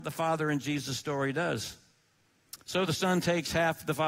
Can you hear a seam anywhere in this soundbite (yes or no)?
no